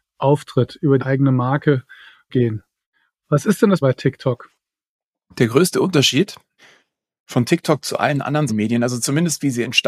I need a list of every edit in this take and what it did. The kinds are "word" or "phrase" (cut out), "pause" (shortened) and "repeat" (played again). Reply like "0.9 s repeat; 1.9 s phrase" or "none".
1.0 s word; 2.3 s word; 3.8 s word; 8.5 s word